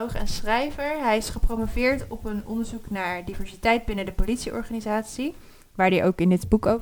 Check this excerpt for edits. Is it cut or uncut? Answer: uncut